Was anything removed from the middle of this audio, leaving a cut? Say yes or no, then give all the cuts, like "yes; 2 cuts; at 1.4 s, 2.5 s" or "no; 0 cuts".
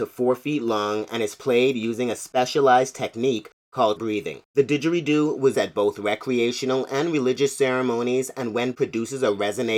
yes; 4 cuts; at 4.0 s, 4.5 s, 5.5 s, 8.7 s